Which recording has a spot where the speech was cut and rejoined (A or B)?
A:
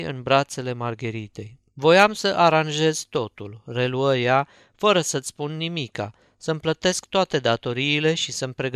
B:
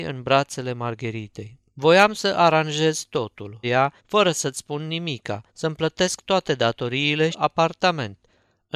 B